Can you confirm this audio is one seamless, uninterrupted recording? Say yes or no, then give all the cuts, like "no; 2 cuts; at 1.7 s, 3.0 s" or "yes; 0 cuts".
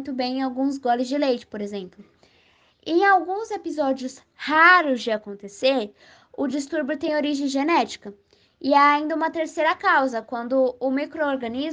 yes; 0 cuts